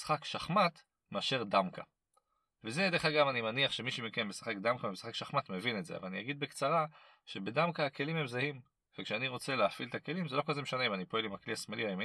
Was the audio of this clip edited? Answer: no; 0 cuts

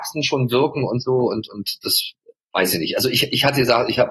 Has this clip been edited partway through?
no; 0 cuts

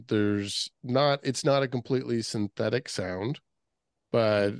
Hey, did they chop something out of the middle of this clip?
no; 0 cuts

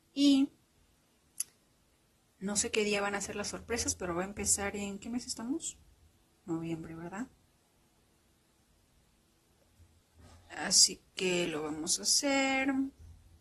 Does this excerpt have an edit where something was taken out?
no; 0 cuts

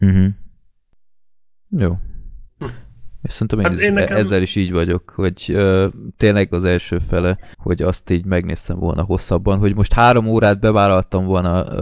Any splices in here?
yes; 2 cuts; at 6.5 s, 7.5 s

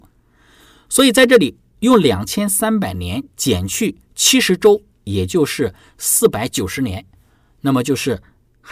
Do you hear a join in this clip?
no; 0 cuts

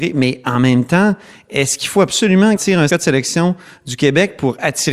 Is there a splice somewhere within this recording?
yes; 2 cuts; at 2.6 s, 2.9 s

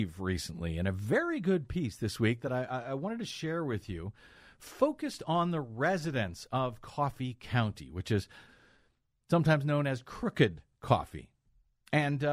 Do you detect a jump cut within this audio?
no; 0 cuts

